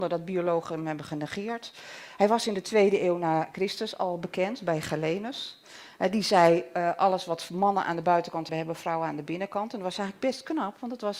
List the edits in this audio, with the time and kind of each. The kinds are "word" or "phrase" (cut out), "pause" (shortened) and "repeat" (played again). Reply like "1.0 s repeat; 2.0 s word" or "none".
8.5 s word

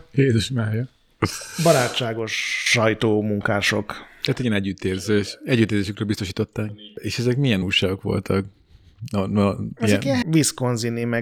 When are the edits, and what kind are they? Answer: 7.6 s word; 10.2 s word

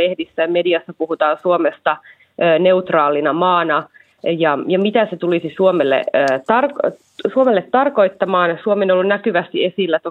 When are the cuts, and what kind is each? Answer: none

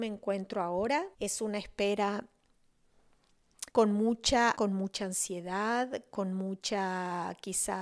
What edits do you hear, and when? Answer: 1.1 s pause; 3.7 s pause; 4.5 s word

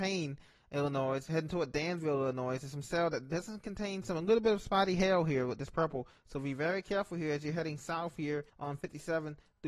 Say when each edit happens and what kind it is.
8.5 s pause

